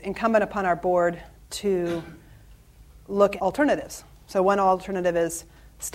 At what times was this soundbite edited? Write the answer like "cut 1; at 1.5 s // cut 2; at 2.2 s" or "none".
cut 1; at 3.4 s